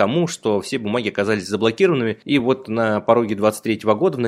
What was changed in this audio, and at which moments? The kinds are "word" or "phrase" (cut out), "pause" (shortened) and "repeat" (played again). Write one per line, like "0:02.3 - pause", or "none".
none